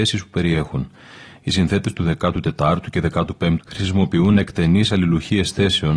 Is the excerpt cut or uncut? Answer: cut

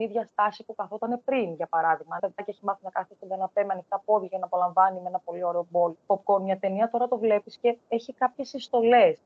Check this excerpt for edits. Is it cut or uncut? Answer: cut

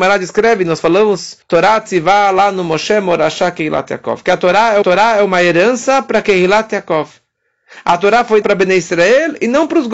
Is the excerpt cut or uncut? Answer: cut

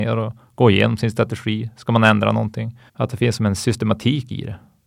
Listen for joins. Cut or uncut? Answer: cut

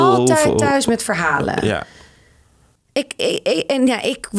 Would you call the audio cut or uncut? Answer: uncut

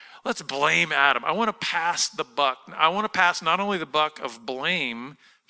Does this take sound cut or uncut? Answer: uncut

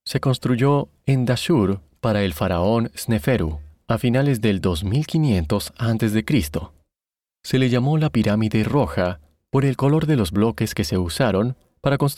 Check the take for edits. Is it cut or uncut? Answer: uncut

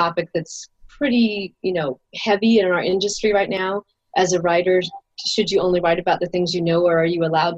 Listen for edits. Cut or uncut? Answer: uncut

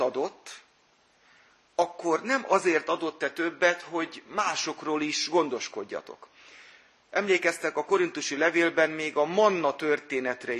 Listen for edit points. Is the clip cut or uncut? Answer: uncut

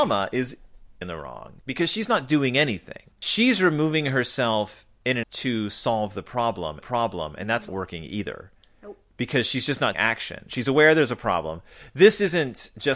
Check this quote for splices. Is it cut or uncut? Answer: cut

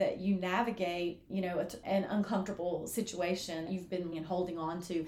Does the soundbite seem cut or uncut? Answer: cut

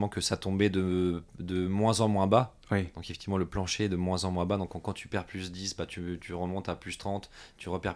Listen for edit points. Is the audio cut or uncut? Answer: cut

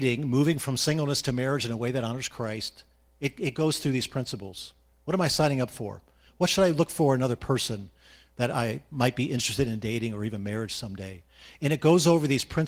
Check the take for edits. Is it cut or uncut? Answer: uncut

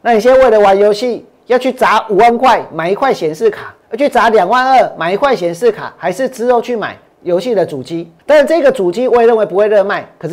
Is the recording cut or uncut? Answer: cut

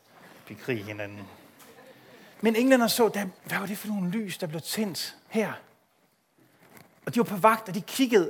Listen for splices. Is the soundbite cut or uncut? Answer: cut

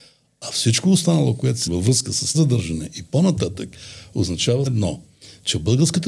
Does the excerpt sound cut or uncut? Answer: cut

